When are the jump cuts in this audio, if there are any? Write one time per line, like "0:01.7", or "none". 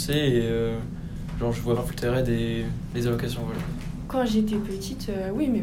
0:01.8